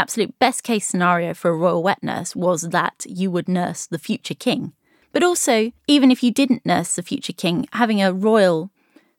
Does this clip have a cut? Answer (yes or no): yes